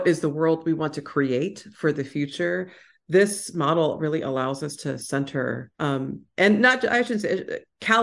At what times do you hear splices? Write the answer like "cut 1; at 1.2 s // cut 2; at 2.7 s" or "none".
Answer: cut 1; at 5.7 s